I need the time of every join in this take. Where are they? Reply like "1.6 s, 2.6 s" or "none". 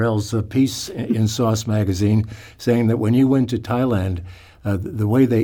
none